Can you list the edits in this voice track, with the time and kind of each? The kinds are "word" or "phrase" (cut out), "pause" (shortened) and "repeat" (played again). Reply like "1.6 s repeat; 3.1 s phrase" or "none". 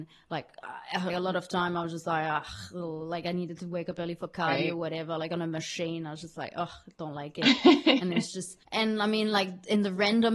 1.1 s phrase; 8.6 s pause